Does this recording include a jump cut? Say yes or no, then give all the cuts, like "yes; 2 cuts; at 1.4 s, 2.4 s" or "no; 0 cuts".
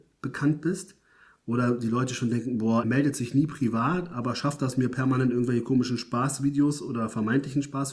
yes; 1 cut; at 2.8 s